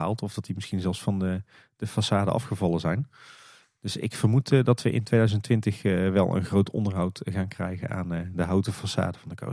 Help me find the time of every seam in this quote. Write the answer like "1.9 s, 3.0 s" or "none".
none